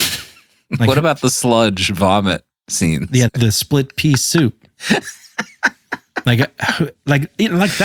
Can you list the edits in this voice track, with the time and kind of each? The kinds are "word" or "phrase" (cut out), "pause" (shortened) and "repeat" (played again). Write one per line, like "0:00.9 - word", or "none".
0:03.3 - word